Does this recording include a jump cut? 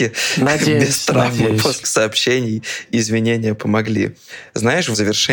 yes; 1 cut; at 1.8 s

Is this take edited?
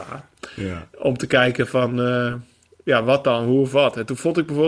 no; 0 cuts

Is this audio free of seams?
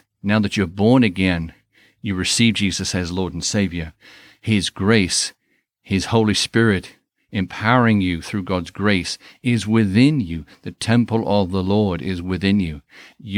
yes; 0 cuts

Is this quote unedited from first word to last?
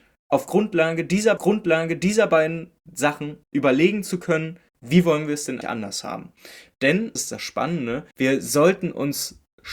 no; 6 cuts; at 1.4 s, 3.4 s, 4.7 s, 5.6 s, 7.2 s, 8.1 s

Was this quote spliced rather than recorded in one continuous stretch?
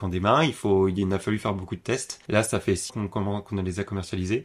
yes; 1 cut; at 2.9 s

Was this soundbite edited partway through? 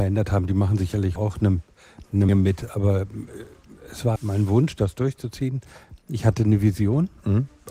yes; 3 cuts; at 1.2 s, 2.3 s, 4.2 s

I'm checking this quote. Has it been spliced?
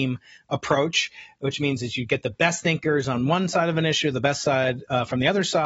no; 0 cuts

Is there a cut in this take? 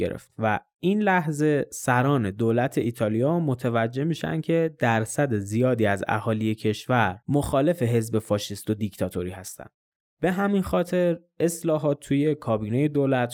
no; 0 cuts

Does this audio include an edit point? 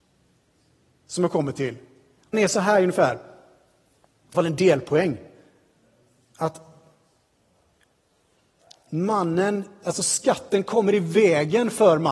yes; 2 cuts; at 2.3 s, 4.3 s

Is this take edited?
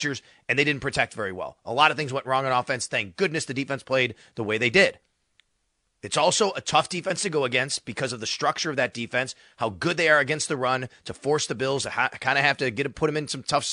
no; 0 cuts

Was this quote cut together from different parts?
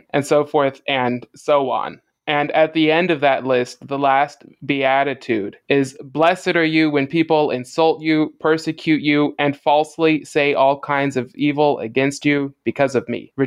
no; 0 cuts

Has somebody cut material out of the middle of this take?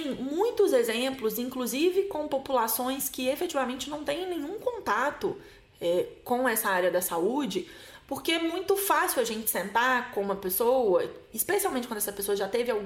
no; 0 cuts

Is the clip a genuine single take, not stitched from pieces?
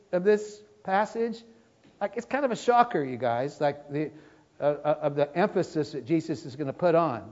yes; 0 cuts

